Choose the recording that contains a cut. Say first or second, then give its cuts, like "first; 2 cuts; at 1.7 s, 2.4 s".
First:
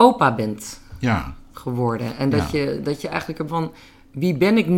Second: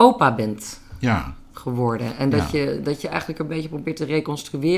first; 1 cut; at 3.5 s